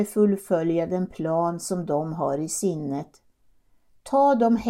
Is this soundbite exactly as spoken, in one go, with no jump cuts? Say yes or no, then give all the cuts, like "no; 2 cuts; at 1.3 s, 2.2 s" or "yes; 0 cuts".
yes; 0 cuts